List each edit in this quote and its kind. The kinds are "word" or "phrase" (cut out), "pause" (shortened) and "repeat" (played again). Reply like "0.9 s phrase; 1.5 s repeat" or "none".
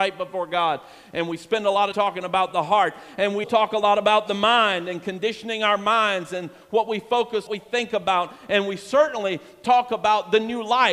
1.9 s phrase; 3.4 s word; 7.5 s phrase